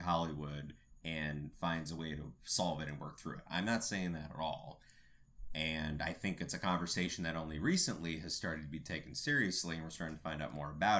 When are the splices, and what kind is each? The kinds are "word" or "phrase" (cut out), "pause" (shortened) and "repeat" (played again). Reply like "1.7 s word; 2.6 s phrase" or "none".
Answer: none